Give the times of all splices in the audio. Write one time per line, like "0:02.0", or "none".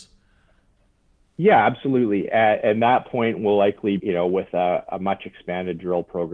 0:04.0